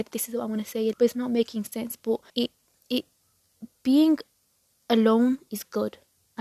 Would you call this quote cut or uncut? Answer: cut